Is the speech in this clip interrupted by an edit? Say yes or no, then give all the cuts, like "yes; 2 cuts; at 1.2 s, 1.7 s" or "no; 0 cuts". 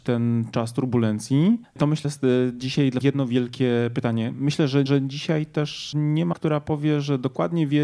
yes; 5 cuts; at 1.6 s, 2.0 s, 3.0 s, 4.9 s, 6.3 s